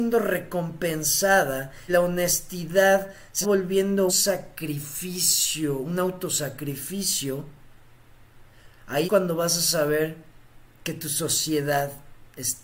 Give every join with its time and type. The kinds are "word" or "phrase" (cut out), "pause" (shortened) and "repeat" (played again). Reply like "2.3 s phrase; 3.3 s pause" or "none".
1.9 s word; 3.4 s word; 4.1 s word; 9.0 s word